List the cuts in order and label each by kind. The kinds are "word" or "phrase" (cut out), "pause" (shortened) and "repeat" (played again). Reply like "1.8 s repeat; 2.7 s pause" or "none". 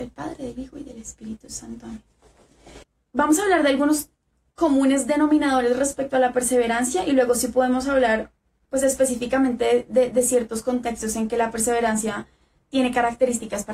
none